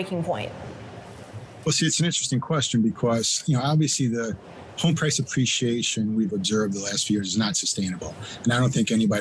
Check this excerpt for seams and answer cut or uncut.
uncut